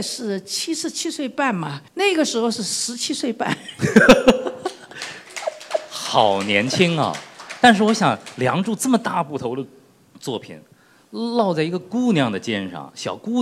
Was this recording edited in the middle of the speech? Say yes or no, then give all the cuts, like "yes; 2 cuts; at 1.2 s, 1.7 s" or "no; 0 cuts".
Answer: yes; 1 cut; at 1.9 s